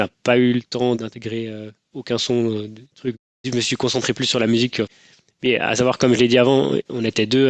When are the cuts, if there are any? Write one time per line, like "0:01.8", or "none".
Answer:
none